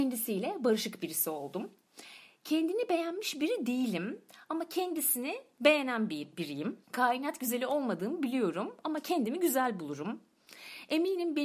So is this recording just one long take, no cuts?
no; 1 cut; at 6.8 s

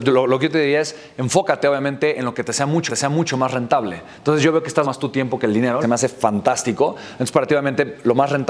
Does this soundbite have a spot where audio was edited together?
yes; 3 cuts; at 2.9 s, 4.8 s, 5.8 s

